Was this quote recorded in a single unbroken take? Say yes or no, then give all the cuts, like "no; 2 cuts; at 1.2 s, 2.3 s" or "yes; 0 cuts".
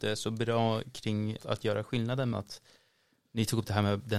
no; 2 cuts; at 1.4 s, 2.3 s